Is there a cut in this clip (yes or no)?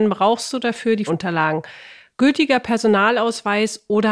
yes